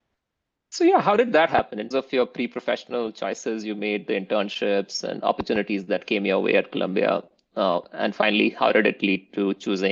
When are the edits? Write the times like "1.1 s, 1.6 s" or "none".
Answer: 1.9 s